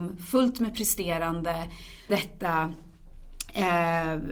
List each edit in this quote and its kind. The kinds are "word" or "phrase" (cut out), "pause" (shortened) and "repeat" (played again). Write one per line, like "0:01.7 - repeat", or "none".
0:02.1 - word